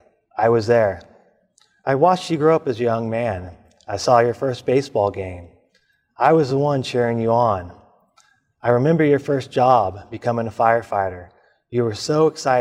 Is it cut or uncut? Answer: uncut